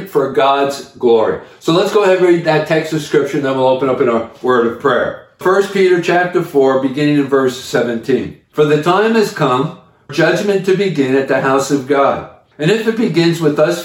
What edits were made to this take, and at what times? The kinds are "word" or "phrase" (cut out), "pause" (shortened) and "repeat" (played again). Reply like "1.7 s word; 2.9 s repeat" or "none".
5.4 s word; 10.1 s word